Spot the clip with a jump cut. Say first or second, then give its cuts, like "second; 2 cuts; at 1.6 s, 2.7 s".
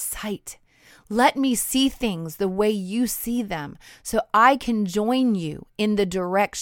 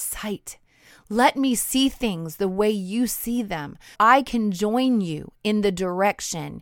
second; 1 cut; at 3.9 s